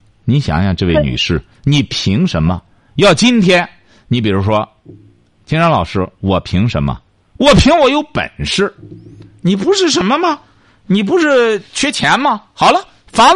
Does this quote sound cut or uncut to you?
uncut